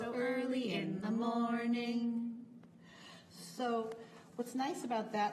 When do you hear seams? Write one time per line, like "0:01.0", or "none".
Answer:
none

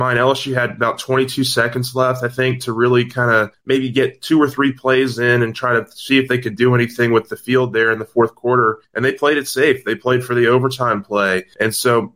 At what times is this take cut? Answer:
none

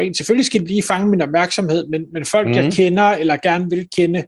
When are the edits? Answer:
none

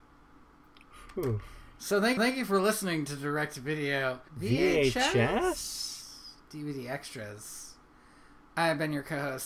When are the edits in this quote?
0:02.2
0:04.3

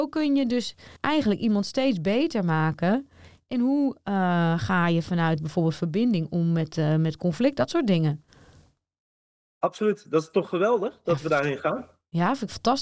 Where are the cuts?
0:01.0

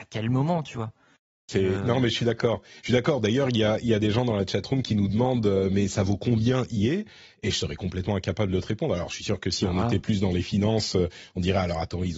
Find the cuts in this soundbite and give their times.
none

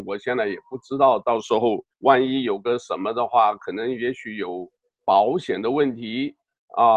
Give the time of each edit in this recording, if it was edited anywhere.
0:01.9
0:04.8

